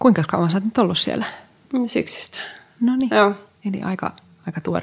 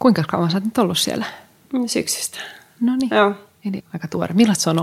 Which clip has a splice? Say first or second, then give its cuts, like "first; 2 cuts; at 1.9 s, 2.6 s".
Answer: second; 1 cut; at 3.8 s